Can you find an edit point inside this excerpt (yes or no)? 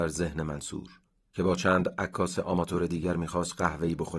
no